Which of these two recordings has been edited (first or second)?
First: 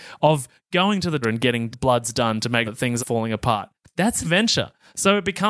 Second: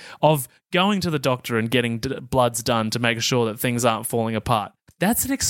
first